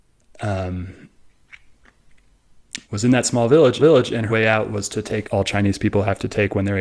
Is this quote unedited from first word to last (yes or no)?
no